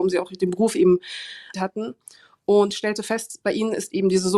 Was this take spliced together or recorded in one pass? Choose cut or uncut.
cut